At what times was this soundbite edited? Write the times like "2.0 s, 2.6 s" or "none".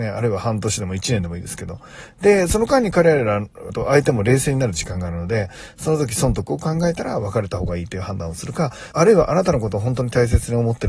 3.7 s, 8.9 s